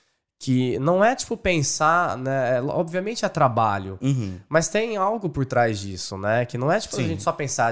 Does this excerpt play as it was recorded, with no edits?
yes; 0 cuts

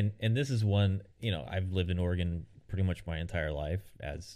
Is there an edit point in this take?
yes; 1 cut; at 1.1 s

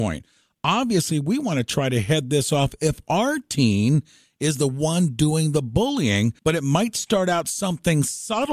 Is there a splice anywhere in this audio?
yes; 1 cut; at 6.4 s

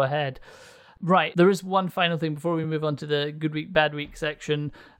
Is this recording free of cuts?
yes; 0 cuts

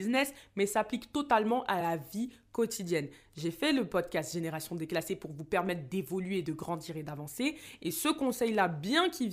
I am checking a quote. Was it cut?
no; 0 cuts

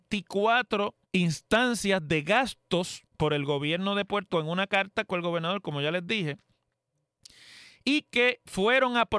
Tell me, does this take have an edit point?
yes; 4 cuts; at 1.0 s, 3.1 s, 4.3 s, 5.1 s

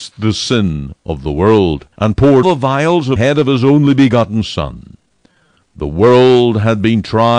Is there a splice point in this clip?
yes; 3 cuts; at 1.9 s, 2.4 s, 3.2 s

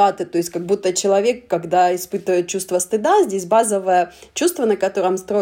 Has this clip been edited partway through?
no; 0 cuts

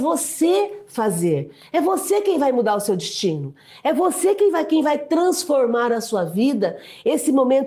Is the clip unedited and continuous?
yes; 0 cuts

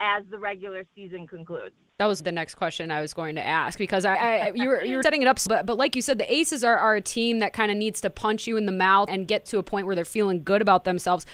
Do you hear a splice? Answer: yes; 7 cuts; at 1.9 s, 2.2 s, 4.1 s, 5.0 s, 5.5 s, 9.1 s, 9.5 s

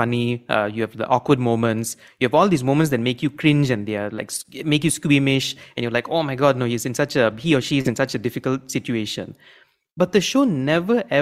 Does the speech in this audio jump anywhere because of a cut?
no; 0 cuts

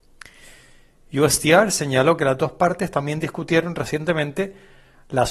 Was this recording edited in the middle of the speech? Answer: no; 0 cuts

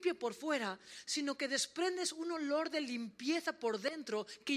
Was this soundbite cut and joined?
no; 0 cuts

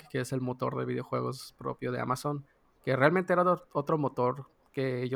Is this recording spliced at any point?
no; 0 cuts

